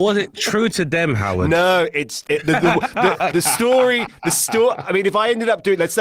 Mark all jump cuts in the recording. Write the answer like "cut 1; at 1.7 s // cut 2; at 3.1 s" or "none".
cut 1; at 2.3 s

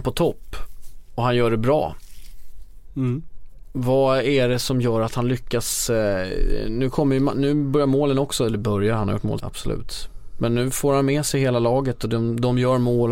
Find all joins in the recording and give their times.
cut 1; at 9.4 s

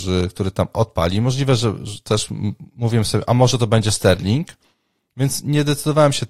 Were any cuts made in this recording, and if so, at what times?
none

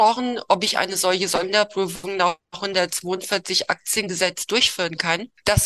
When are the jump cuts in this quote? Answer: none

